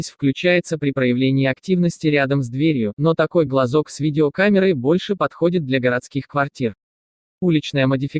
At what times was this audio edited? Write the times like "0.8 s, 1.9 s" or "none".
none